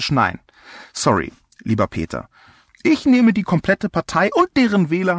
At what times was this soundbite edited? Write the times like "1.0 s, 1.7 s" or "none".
none